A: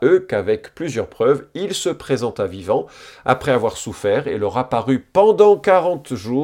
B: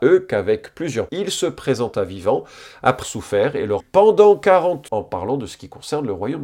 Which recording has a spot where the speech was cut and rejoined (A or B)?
B